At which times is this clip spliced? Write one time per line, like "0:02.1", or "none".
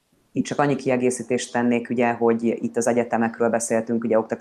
none